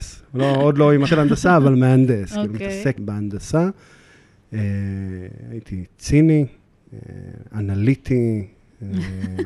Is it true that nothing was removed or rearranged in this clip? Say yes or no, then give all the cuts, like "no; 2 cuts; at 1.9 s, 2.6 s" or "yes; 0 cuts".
no; 2 cuts; at 1.1 s, 3.0 s